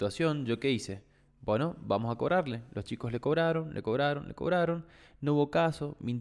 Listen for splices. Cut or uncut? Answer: uncut